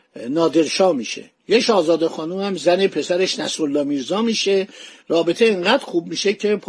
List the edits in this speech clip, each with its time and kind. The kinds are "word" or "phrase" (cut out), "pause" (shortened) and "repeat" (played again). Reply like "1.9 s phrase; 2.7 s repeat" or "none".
none